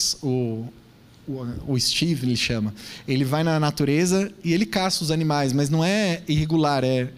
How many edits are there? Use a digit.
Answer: 0